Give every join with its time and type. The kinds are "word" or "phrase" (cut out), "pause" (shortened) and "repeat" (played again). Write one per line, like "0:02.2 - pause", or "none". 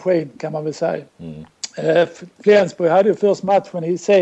0:01.1 - pause